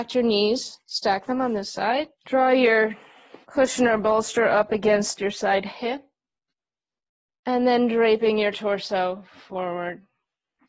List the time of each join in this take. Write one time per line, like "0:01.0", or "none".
0:02.1
0:03.4
0:06.5